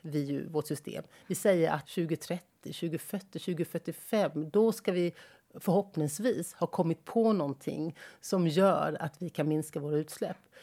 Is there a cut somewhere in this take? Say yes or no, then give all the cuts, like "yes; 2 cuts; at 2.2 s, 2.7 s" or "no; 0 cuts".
yes; 1 cut; at 1.8 s